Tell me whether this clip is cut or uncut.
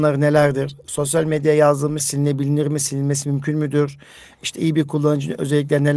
cut